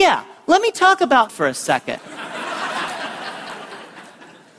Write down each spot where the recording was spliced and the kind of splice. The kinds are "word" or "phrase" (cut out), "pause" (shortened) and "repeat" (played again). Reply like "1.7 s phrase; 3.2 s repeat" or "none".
1.3 s word